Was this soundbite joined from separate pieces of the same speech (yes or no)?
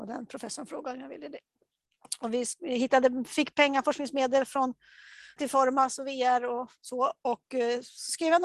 yes